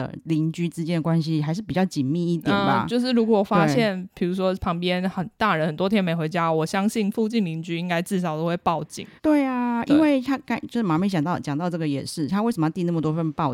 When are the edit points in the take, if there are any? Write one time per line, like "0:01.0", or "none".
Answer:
0:09.2

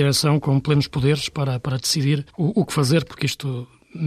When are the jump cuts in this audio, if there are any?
0:02.3

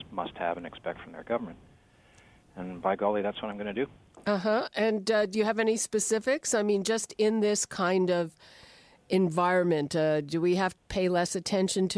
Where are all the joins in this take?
0:10.8

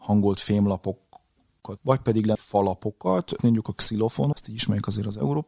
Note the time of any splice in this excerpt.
0:01.8
0:02.3
0:03.4
0:04.3

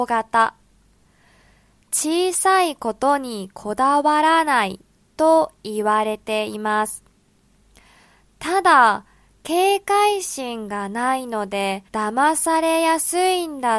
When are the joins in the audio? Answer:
0:11.9

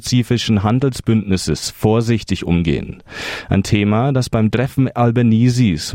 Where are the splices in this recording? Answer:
none

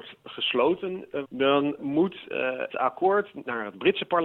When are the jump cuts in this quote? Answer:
0:01.2
0:01.8
0:02.7

